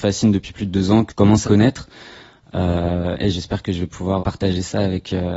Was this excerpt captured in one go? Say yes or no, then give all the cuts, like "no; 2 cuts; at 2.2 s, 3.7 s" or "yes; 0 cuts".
no; 4 cuts; at 1.1 s, 1.4 s, 3.2 s, 4.2 s